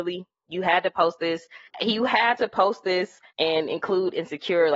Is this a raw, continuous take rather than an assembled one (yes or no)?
no